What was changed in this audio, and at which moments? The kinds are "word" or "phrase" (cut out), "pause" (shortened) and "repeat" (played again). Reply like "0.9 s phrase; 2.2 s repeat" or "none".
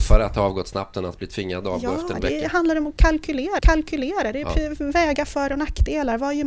2.1 s word; 3.6 s repeat